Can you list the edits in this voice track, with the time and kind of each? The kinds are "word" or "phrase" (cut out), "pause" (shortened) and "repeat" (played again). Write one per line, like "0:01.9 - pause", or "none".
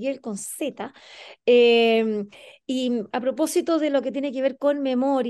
none